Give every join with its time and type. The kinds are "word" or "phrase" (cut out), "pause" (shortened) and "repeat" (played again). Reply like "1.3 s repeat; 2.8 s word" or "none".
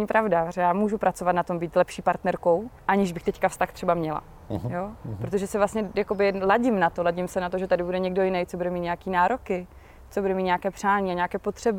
2.8 s pause